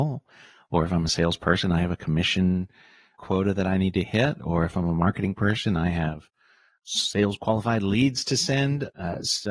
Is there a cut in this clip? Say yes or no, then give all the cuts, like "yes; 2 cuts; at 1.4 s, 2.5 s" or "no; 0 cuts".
no; 0 cuts